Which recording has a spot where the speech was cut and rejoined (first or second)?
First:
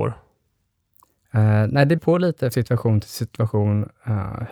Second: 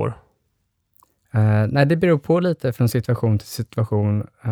first